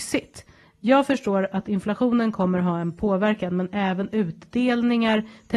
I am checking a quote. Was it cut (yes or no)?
no